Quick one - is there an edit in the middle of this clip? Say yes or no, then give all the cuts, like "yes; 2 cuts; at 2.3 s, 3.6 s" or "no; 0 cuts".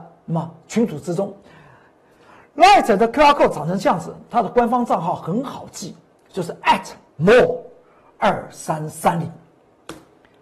no; 0 cuts